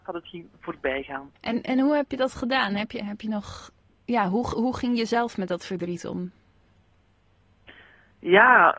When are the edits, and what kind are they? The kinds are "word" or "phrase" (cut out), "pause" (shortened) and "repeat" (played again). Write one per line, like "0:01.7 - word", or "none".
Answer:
0:01.4 - pause
0:03.9 - pause

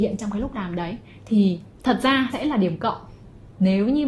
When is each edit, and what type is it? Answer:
0:02.3 - word

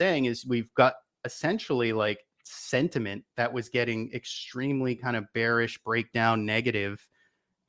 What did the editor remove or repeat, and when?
none

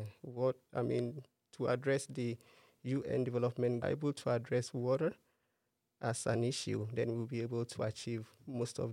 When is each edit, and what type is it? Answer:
0:03.8 - phrase

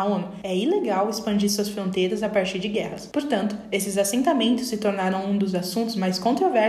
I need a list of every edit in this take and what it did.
none

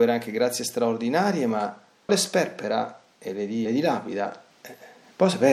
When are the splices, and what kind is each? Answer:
0:02.1 - phrase
0:03.6 - word

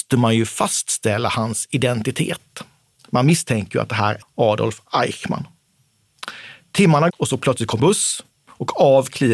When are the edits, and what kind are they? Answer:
0:04.2 - word
0:07.1 - word
0:07.8 - word

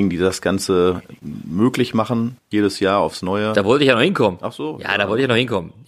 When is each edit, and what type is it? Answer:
0:02.4 - pause

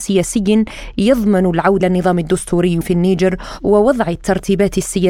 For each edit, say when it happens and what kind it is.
0:01.8 - word
0:02.8 - word

